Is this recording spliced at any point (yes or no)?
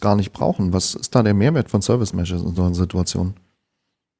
no